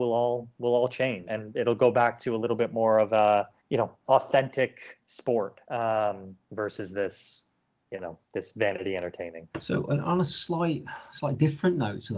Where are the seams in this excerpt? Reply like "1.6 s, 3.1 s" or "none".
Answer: 1.3 s, 3.6 s, 4.0 s, 5.6 s, 8.2 s, 9.5 s

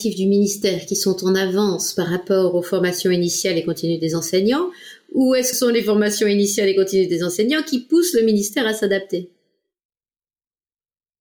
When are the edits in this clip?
5.5 s

